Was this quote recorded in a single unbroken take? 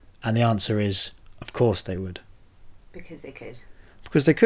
yes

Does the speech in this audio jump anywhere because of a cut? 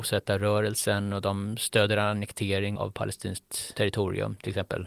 yes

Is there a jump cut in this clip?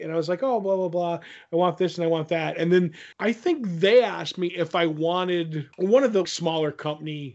yes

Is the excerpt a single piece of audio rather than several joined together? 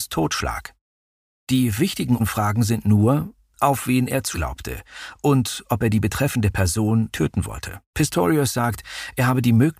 no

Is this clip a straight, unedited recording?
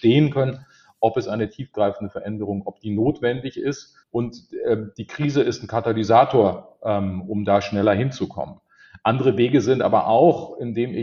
no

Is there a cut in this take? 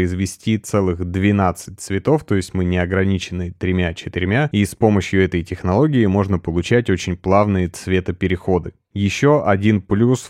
no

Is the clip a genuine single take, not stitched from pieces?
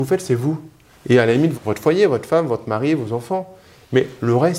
no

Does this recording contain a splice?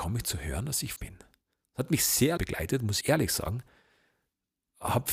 yes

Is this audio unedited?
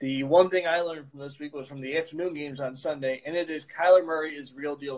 yes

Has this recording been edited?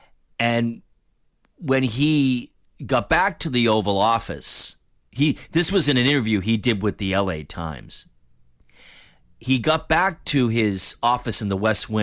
no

